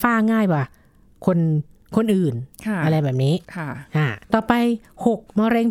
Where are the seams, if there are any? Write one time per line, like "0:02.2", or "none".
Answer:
0:03.4
0:04.2